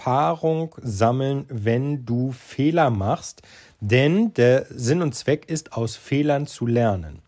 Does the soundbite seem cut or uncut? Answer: uncut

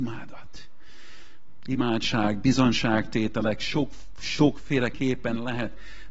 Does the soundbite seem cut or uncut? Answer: uncut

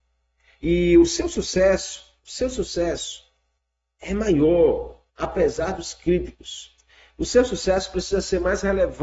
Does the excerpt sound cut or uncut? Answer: cut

